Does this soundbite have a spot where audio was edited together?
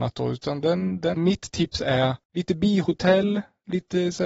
yes; 2 cuts; at 1.1 s, 2.2 s

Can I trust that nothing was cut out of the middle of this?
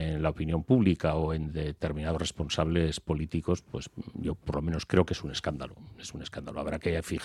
yes; 0 cuts

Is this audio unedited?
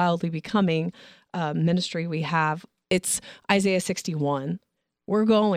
yes; 0 cuts

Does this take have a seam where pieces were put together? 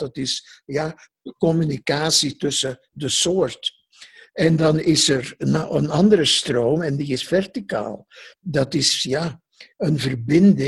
no; 0 cuts

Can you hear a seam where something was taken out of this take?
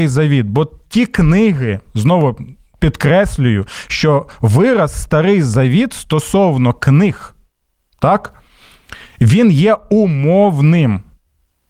no; 0 cuts

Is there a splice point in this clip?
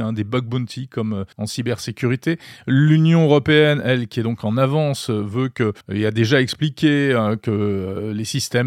yes; 2 cuts; at 1.3 s, 5.8 s

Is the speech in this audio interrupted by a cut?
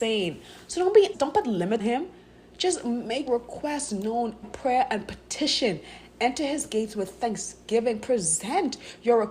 yes; 4 cuts; at 1.1 s, 1.8 s, 3.3 s, 4.4 s

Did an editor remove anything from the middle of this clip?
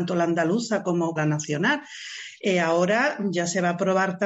yes; 1 cut; at 1.2 s

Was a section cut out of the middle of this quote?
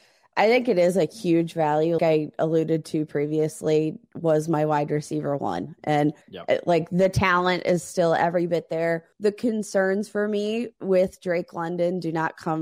yes; 3 cuts; at 2.0 s, 6.2 s, 9.1 s

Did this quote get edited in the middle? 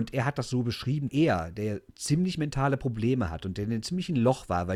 yes; 1 cut; at 1.1 s

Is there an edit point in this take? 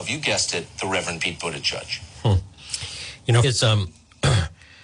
yes; 1 cut; at 3.4 s

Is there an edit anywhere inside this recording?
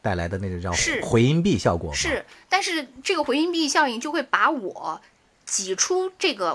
no; 0 cuts

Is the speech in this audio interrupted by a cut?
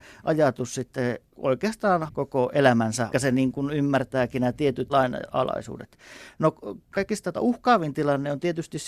yes; 4 cuts; at 2.1 s, 3.1 s, 4.9 s, 7.3 s

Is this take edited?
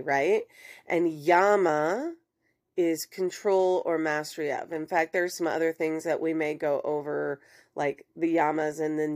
no; 0 cuts

